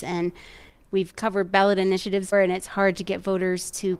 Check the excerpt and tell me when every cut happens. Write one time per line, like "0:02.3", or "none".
0:02.3